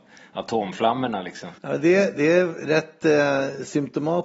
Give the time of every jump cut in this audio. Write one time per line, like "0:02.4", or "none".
0:01.6

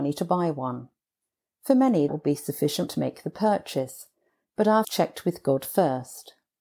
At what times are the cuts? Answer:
0:02.1
0:02.9
0:04.8

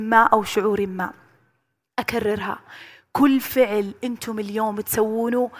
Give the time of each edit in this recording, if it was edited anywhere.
none

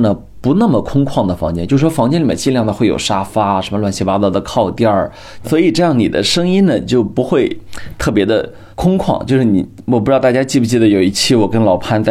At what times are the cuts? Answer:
0:05.4
0:08.7

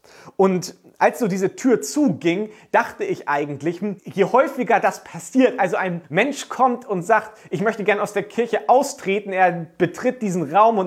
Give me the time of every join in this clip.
0:04.0
0:06.0

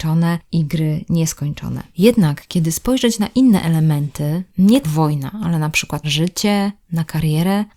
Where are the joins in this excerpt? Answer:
0:04.8
0:06.0

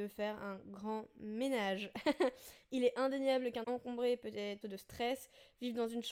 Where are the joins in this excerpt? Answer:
0:03.6
0:04.6

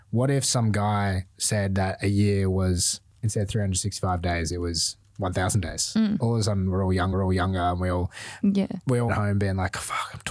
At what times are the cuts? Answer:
0:07.1
0:09.1

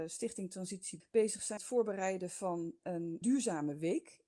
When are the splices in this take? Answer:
0:01.0
0:01.6
0:03.2

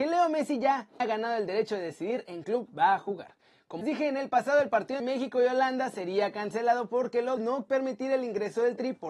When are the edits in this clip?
0:01.0
0:02.4
0:03.8
0:05.0
0:07.4
0:07.7

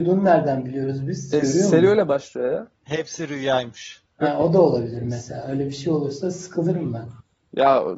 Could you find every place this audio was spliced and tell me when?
0:02.7
0:04.1

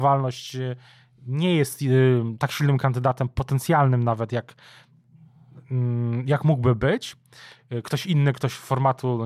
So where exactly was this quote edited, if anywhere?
0:05.6

